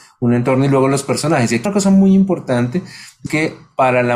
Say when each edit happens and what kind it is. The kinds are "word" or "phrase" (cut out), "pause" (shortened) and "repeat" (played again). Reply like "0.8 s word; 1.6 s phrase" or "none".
1.7 s word; 3.3 s word